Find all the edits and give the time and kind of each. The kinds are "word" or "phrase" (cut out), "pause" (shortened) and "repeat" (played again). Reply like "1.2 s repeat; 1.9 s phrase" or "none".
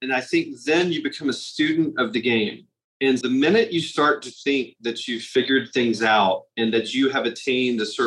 3.2 s word